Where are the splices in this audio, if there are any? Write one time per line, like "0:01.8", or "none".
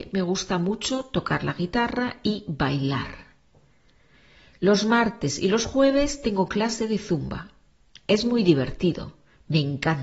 none

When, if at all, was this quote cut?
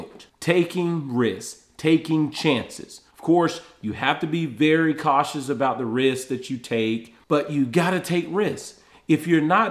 0:03.1

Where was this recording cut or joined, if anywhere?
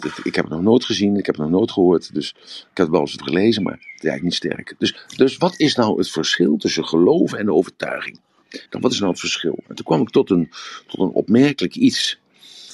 0:03.2
0:08.7

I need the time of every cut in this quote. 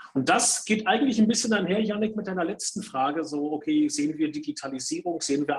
none

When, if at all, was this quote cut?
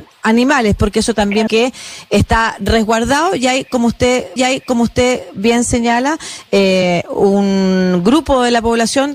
0:01.5
0:04.4

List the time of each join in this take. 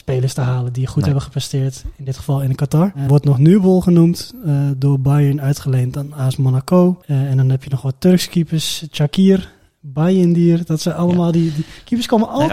0:03.1

